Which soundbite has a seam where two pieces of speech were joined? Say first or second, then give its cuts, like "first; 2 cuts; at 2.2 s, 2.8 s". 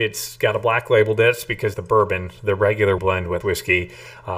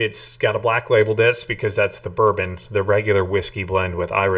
first; 3 cuts; at 1.7 s, 3.0 s, 3.4 s